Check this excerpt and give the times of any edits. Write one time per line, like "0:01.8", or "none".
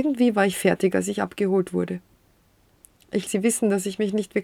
0:03.3